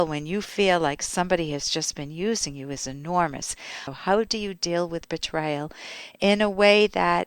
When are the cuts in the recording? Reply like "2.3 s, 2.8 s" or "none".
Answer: none

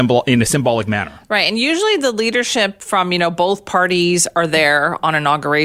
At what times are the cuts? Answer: none

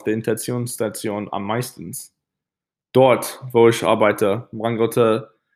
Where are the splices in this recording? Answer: none

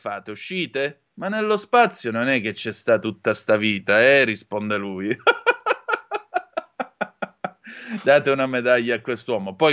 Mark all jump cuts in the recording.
1.1 s

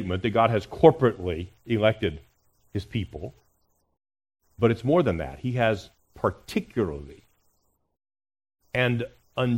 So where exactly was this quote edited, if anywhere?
none

